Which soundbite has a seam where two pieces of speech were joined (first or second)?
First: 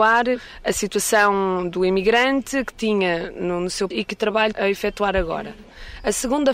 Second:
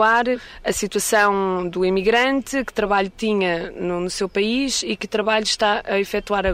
first